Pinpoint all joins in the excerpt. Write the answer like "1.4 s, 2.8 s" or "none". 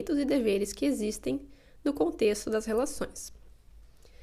none